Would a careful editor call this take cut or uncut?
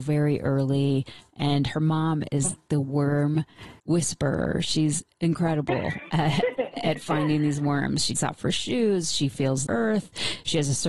cut